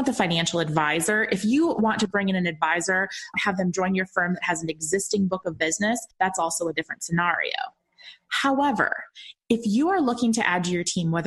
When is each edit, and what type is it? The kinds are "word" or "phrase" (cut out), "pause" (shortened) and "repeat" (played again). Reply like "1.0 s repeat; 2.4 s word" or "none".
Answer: 6.1 s pause